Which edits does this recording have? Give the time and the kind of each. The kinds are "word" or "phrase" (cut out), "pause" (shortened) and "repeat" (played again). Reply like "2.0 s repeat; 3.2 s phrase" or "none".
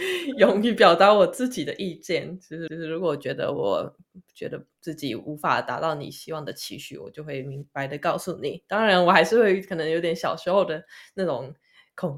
2.7 s repeat